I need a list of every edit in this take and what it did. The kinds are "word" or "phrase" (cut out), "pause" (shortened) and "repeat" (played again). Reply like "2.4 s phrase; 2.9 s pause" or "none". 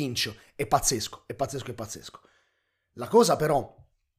none